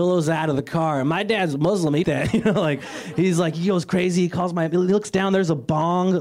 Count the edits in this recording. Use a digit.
1